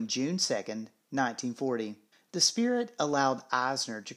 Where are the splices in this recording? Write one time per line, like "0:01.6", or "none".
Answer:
0:02.1